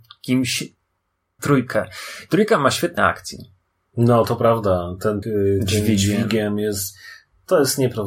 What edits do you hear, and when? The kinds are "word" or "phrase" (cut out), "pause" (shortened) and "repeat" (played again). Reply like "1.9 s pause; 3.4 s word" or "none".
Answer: 1.4 s word; 3.0 s word; 5.2 s word